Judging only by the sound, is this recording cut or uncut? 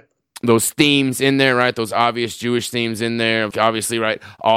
cut